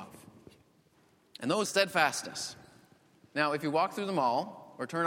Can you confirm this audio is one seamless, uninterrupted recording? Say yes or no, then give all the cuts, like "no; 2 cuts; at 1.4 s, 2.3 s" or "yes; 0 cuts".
no; 1 cut; at 1.6 s